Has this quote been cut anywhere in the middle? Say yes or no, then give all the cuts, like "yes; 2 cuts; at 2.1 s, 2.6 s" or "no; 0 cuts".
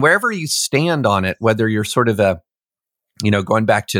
no; 0 cuts